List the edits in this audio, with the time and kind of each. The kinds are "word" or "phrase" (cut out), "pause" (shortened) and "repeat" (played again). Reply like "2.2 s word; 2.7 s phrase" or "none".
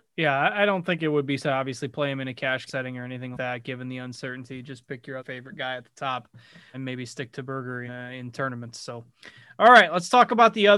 1.4 s word; 2.7 s word; 3.3 s word; 5.2 s word; 6.7 s word; 7.9 s word